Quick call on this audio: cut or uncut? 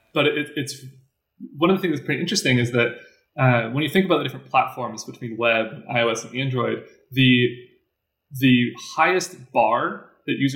uncut